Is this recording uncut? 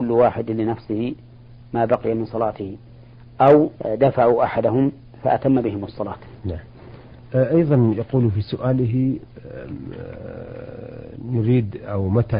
no; 2 cuts; at 3.8 s, 6.4 s

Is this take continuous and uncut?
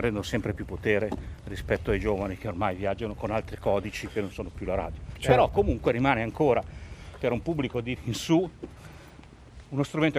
no; 1 cut; at 8.0 s

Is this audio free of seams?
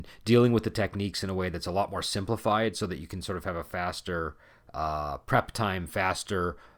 yes; 0 cuts

